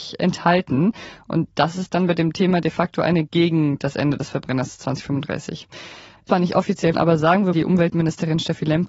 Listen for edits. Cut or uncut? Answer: cut